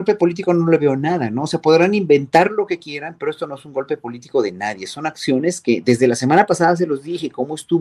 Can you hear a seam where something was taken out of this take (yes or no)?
no